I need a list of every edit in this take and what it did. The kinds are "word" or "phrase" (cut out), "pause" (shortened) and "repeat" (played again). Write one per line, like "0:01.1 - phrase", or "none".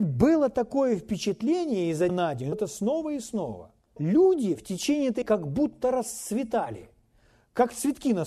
0:02.1 - word
0:02.5 - word
0:04.0 - word
0:05.2 - word